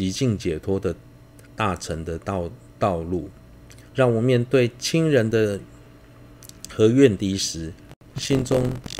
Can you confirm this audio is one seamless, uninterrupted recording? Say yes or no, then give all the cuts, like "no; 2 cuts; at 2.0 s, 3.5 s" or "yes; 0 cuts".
no; 2 cuts; at 1.5 s, 3.9 s